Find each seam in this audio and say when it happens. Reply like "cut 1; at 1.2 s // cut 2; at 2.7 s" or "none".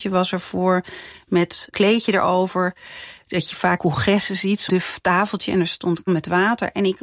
cut 1; at 1.7 s // cut 2; at 3.8 s // cut 3; at 4.7 s // cut 4; at 6.1 s